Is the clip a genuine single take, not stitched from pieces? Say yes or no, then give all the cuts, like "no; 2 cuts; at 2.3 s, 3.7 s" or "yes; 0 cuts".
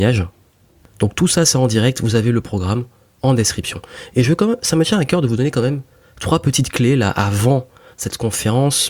yes; 0 cuts